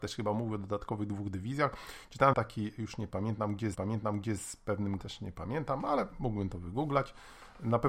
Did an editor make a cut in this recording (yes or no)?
yes